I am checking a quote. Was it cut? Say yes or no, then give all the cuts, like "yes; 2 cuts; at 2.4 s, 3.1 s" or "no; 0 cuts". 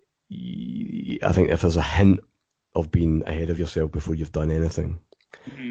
no; 0 cuts